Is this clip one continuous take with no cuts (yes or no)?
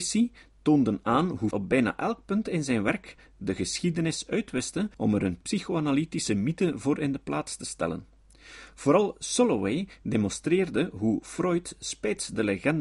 no